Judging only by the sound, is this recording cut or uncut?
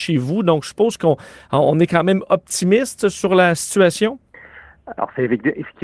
uncut